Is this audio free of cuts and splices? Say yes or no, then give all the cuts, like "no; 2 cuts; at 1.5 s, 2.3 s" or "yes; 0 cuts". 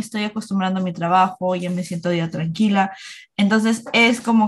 yes; 0 cuts